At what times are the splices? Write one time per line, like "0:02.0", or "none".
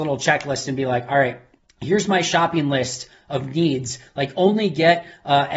0:01.6